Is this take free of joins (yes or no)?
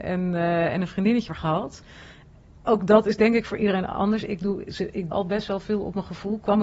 no